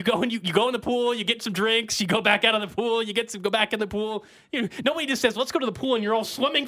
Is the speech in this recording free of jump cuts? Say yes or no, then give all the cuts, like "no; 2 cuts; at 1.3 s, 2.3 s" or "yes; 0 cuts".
yes; 0 cuts